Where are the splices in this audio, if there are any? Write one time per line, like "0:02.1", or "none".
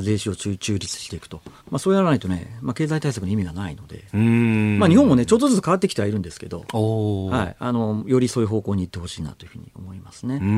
0:01.6